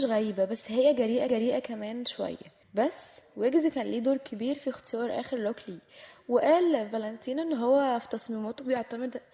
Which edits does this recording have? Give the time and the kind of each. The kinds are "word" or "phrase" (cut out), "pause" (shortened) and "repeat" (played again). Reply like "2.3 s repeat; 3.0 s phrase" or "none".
1.3 s repeat; 2.6 s pause